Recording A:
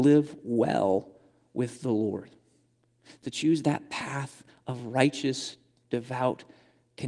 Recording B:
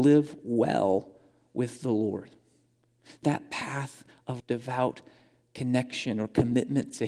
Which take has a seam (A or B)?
B